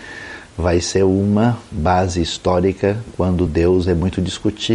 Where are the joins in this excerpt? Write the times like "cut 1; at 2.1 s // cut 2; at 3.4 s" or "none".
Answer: none

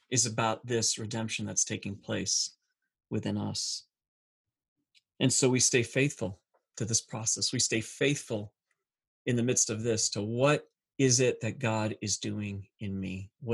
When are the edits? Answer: none

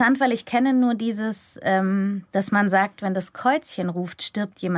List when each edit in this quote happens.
none

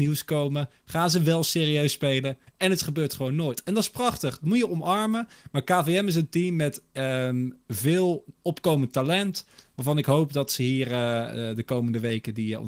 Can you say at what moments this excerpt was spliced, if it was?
none

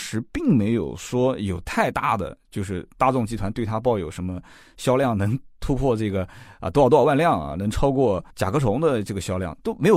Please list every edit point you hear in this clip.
cut 1; at 8.3 s

